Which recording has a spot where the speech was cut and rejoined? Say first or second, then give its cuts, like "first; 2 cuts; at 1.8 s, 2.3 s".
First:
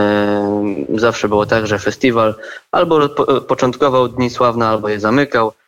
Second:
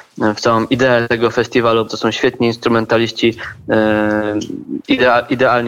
second; 1 cut; at 1.9 s